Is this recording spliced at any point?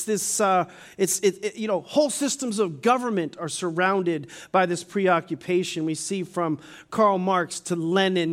no; 0 cuts

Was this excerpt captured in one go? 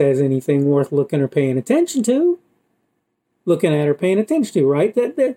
yes; 0 cuts

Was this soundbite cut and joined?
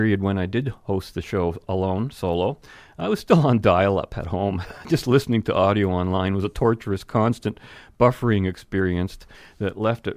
no; 0 cuts

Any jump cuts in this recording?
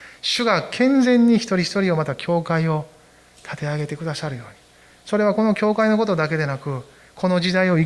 no; 0 cuts

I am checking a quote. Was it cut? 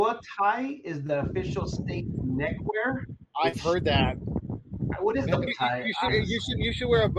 yes; 2 cuts; at 5.5 s, 6.1 s

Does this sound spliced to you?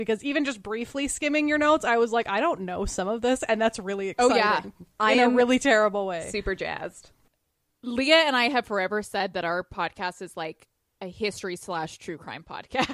no; 0 cuts

